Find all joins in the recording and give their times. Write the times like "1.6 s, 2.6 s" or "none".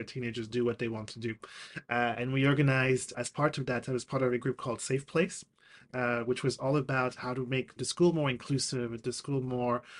3.1 s, 7.8 s